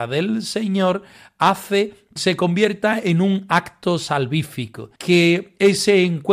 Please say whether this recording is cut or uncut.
cut